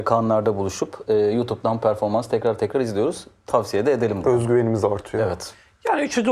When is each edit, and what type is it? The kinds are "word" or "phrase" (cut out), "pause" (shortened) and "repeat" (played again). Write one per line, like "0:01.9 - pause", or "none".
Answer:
none